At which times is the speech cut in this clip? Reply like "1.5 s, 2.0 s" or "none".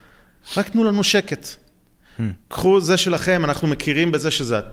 2.4 s